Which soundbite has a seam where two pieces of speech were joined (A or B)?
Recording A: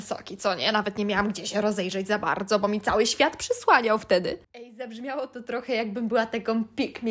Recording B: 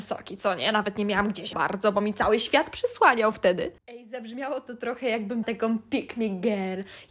B